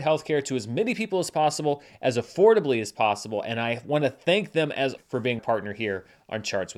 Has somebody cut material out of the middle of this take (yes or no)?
yes